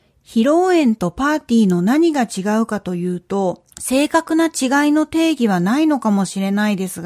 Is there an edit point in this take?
yes; 1 cut; at 3.7 s

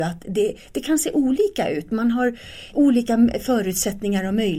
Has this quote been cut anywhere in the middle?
yes; 1 cut; at 2.7 s

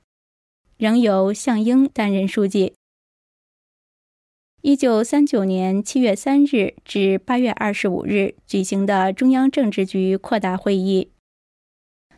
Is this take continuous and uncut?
yes; 0 cuts

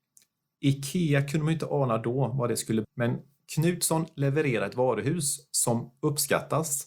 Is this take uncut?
no; 1 cut; at 2.8 s

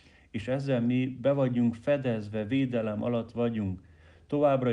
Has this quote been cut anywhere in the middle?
no; 0 cuts

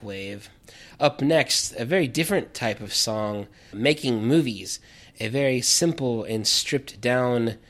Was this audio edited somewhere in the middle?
yes; 1 cut; at 3.7 s

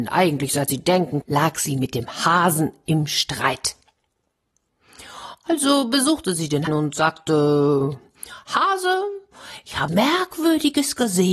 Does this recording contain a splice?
yes; 3 cuts; at 1.2 s, 6.7 s, 9.9 s

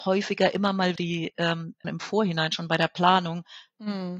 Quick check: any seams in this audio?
yes; 2 cuts; at 1.0 s, 1.8 s

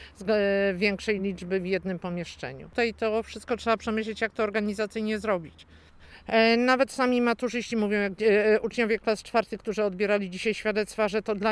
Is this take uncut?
yes; 0 cuts

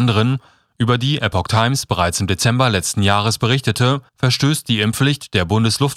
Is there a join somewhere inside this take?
yes; 1 cut; at 4.1 s

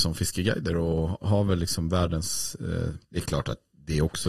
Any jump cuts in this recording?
yes; 2 cuts; at 1.2 s, 3.0 s

